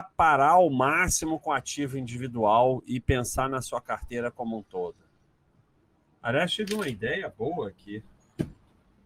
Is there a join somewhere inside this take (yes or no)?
no